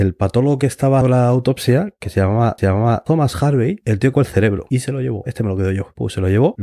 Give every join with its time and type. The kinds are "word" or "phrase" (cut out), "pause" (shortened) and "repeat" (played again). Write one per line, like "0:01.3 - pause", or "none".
0:01.0 - word
0:02.6 - repeat
0:04.1 - phrase